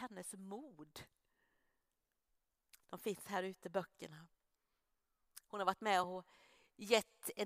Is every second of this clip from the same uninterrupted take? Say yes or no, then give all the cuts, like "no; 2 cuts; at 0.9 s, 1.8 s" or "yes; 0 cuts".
yes; 0 cuts